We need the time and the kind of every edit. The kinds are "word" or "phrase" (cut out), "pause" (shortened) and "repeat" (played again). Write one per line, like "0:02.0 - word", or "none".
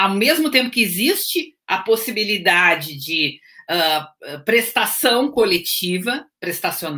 none